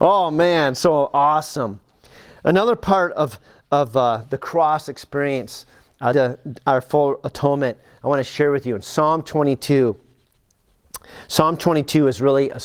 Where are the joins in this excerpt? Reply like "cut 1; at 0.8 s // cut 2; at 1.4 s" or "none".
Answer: cut 1; at 6.1 s